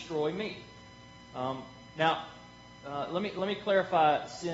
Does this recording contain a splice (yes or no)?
no